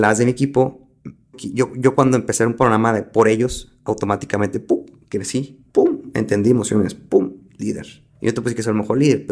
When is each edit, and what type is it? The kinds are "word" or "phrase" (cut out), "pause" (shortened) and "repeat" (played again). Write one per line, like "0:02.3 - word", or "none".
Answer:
0:01.3 - word
0:05.7 - pause
0:08.2 - pause